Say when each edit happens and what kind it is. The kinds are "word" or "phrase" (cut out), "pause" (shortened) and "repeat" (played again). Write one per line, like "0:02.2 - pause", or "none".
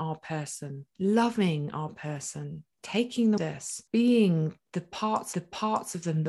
0:00.9 - pause
0:02.7 - pause
0:03.4 - word
0:03.9 - pause
0:05.3 - repeat